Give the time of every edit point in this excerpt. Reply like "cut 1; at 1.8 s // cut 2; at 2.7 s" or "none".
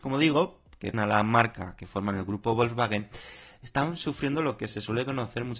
cut 1; at 0.9 s